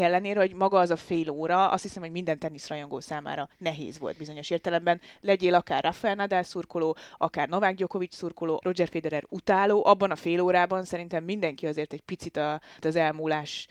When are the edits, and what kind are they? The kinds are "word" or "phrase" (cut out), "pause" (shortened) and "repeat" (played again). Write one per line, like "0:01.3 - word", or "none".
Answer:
0:03.5 - pause
0:08.6 - word
0:12.8 - word